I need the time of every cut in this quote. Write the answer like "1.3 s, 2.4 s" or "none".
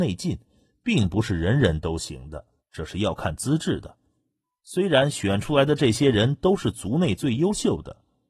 2.6 s